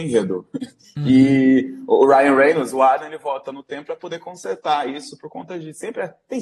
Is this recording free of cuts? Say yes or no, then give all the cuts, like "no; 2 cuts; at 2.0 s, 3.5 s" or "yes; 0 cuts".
yes; 0 cuts